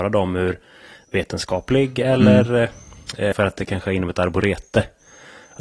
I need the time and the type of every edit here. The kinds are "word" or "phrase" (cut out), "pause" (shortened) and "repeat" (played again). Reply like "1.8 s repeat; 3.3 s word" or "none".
3.3 s word